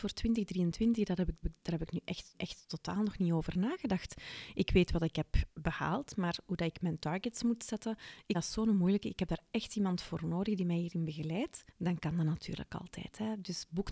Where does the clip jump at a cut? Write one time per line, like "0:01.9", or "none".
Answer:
0:01.4
0:02.3
0:08.3
0:11.7